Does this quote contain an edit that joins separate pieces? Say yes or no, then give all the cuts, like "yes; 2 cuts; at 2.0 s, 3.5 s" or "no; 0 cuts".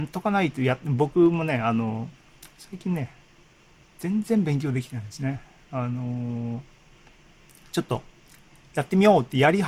no; 0 cuts